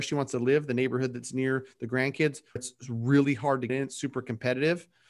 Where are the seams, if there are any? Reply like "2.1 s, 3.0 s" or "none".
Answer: 2.6 s, 3.7 s